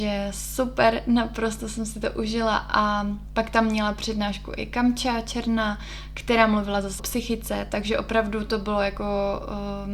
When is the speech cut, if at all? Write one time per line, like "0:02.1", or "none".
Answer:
0:07.0